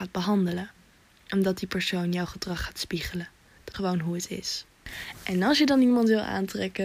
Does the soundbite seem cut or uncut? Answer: cut